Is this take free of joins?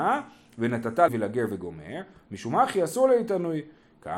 no; 1 cut; at 1.1 s

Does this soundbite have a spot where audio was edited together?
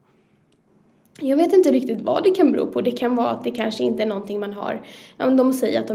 no; 0 cuts

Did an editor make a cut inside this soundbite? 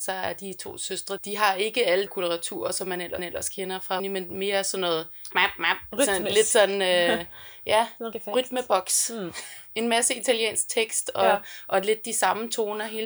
yes; 6 cuts; at 1.2 s, 2.1 s, 3.2 s, 4.0 s, 5.3 s, 8.1 s

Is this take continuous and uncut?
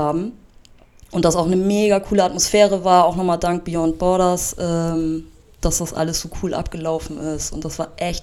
yes; 0 cuts

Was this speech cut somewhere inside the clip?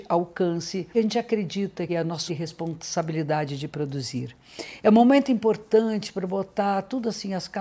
yes; 3 cuts; at 0.9 s, 1.9 s, 2.3 s

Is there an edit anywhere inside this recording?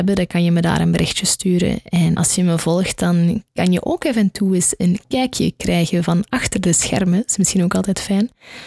yes; 1 cut; at 2.1 s

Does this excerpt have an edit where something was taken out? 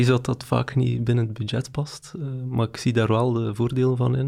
no; 0 cuts

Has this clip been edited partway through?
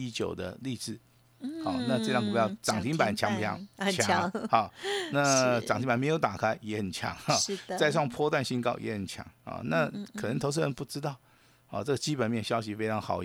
no; 0 cuts

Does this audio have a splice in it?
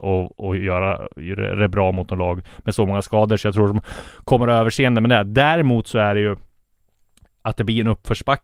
no; 0 cuts

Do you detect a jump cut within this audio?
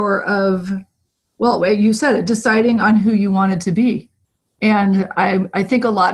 no; 0 cuts

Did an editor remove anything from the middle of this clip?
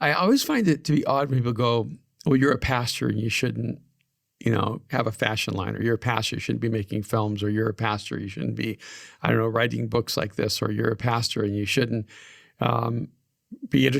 no; 0 cuts

